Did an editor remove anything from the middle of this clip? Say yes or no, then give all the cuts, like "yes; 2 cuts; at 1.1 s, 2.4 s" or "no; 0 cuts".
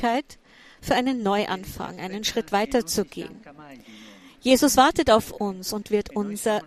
no; 0 cuts